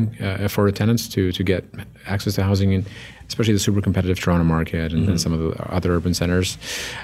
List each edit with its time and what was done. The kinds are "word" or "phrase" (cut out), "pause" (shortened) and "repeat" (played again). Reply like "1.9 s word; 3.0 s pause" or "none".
none